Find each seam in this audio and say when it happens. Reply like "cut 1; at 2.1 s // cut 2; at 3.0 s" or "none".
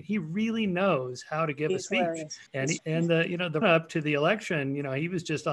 cut 1; at 2.5 s // cut 2; at 2.8 s // cut 3; at 3.6 s